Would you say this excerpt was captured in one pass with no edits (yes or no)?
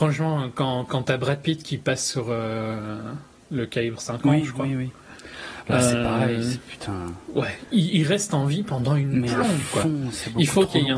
yes